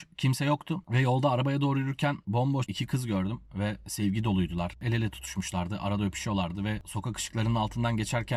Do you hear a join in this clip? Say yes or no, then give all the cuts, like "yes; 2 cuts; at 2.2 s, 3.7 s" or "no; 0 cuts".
yes; 1 cut; at 2.7 s